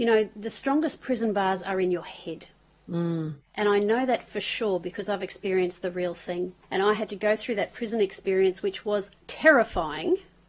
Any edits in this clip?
yes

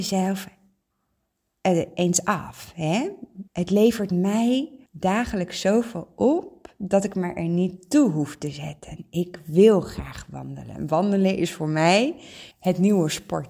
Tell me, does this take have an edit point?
yes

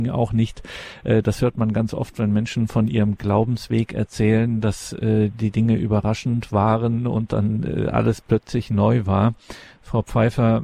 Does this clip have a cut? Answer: no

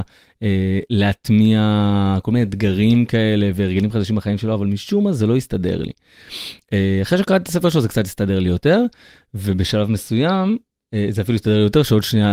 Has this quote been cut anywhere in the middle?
no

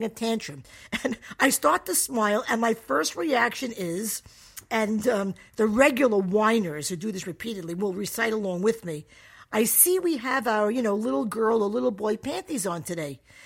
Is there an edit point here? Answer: no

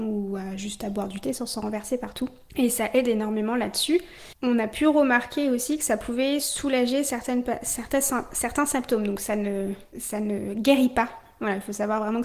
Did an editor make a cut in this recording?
no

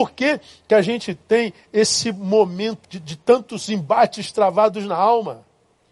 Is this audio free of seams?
no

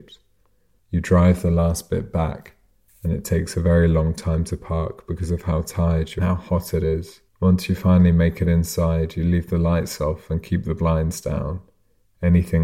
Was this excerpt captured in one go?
no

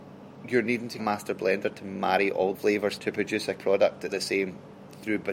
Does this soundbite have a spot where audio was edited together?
yes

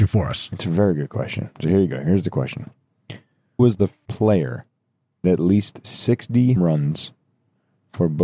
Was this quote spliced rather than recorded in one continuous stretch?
yes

